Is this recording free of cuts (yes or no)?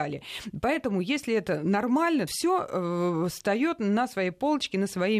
no